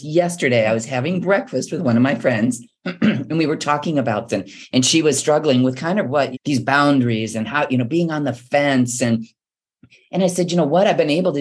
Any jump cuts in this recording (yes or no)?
yes